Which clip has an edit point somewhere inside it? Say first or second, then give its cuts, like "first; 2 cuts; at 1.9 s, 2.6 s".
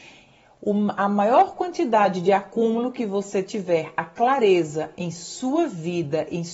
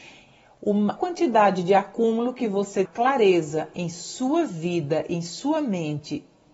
second; 2 cuts; at 1.0 s, 2.9 s